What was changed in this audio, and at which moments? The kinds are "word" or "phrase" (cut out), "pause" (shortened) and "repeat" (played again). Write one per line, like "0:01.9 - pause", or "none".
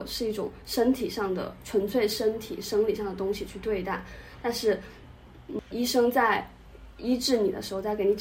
0:05.7 - word

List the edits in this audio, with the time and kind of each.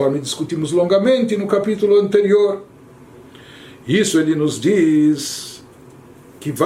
none

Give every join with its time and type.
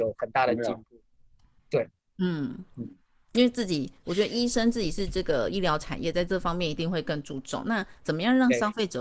none

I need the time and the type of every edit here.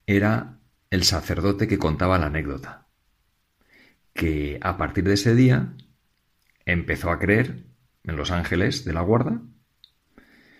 none

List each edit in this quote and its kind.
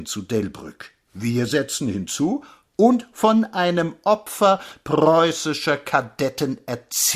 none

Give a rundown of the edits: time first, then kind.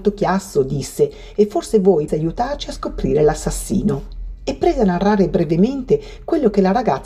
0:02.1 - word

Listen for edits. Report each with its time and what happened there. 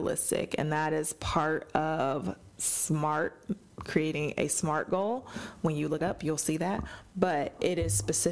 0:06.0 - word

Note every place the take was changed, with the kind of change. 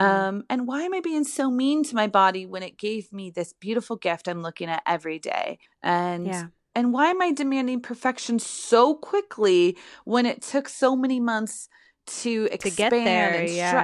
0:05.7 - pause

